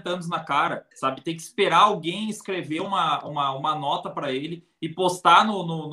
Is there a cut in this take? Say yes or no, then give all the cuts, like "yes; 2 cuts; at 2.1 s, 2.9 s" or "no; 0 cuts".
yes; 1 cut; at 0.9 s